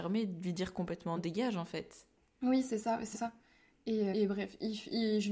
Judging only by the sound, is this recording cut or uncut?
cut